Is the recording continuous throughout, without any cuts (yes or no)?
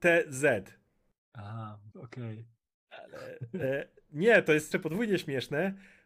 no